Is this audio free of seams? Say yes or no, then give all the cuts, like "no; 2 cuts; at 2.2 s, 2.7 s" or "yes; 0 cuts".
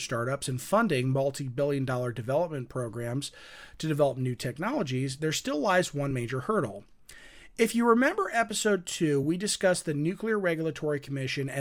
yes; 0 cuts